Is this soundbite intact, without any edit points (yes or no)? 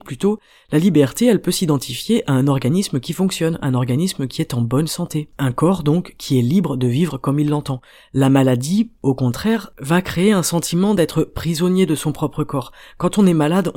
yes